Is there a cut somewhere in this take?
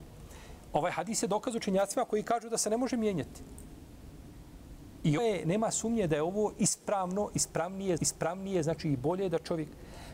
yes; 2 cuts; at 5.2 s, 8.0 s

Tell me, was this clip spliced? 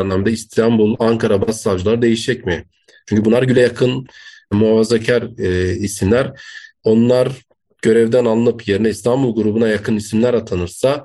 no; 0 cuts

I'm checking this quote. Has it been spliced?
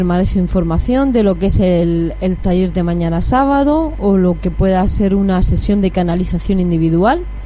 no; 0 cuts

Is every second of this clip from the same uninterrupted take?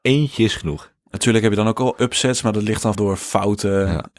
no; 1 cut; at 2.9 s

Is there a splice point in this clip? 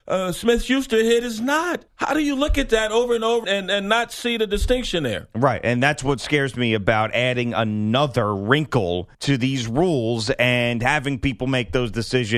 yes; 3 cuts; at 1.9 s, 3.4 s, 9.1 s

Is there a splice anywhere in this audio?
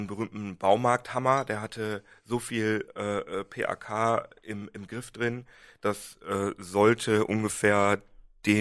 no; 0 cuts

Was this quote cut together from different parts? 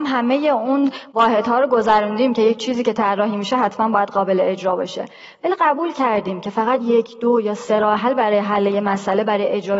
no; 0 cuts

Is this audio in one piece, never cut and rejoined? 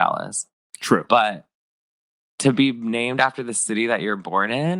yes; 0 cuts

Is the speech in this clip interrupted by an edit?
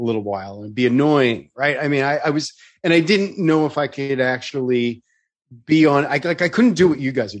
no; 0 cuts

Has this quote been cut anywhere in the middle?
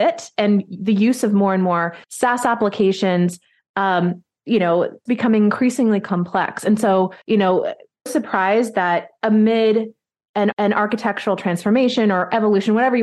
yes; 5 cuts; at 2.0 s, 5.1 s, 7.2 s, 8.1 s, 10.5 s

